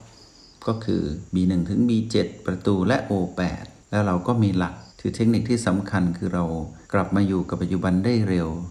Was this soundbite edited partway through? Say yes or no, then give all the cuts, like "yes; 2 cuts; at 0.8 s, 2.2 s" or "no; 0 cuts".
yes; 3 cuts; at 3.8 s, 4.9 s, 6.8 s